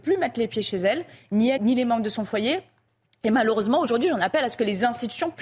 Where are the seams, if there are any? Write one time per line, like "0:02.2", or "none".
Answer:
0:01.6